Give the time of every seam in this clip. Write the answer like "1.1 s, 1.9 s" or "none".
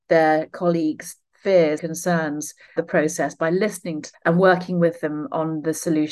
1.8 s, 2.8 s, 4.1 s